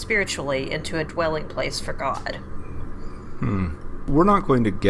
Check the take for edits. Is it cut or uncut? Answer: uncut